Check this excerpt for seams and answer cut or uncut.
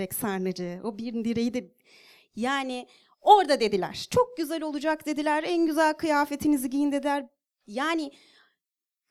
uncut